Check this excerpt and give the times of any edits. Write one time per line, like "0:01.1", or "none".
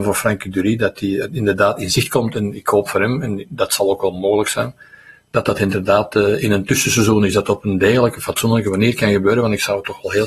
none